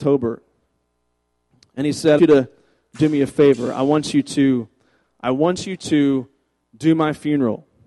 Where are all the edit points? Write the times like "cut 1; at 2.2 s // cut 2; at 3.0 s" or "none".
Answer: cut 1; at 2.2 s